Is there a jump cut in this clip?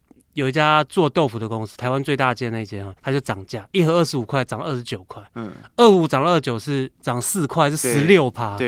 yes; 2 cuts; at 3.0 s, 6.9 s

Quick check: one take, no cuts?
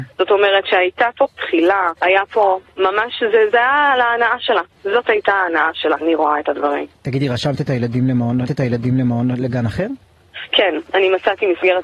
no; 5 cuts; at 1.3 s, 2.0 s, 4.7 s, 6.0 s, 8.5 s

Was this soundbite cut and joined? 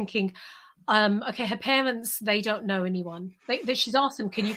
no; 0 cuts

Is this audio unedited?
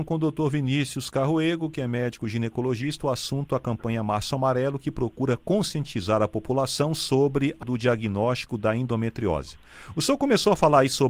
no; 1 cut; at 7.6 s

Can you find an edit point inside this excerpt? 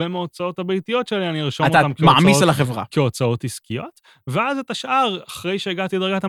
no; 0 cuts

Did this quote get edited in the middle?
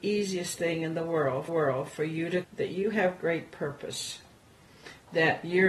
yes; 2 cuts; at 1.5 s, 2.4 s

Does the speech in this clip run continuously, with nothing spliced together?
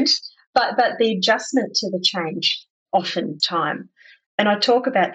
no; 1 cut; at 3.4 s

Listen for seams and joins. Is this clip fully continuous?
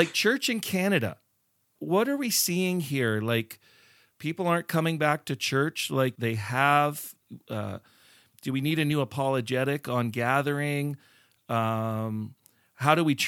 no; 2 cuts; at 1.8 s, 6.2 s

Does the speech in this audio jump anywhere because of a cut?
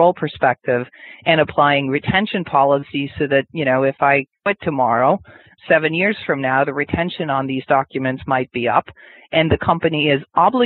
no; 0 cuts

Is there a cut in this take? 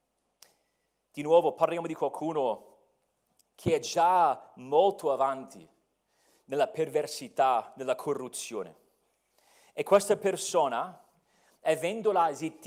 no; 0 cuts

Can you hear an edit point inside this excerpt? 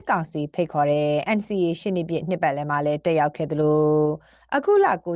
no; 0 cuts

